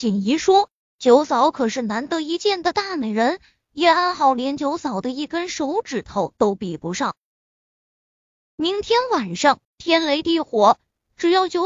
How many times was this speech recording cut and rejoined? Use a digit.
1